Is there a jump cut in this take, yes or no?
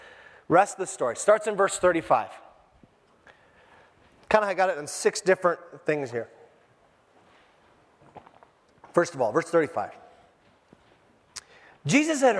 no